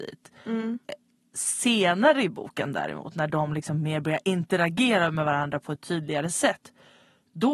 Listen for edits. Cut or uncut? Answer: uncut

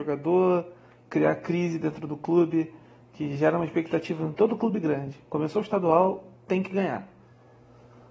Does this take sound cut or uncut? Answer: uncut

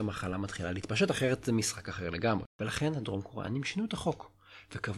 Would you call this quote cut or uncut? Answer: cut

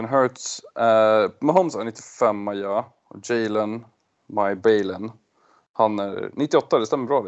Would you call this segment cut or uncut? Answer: uncut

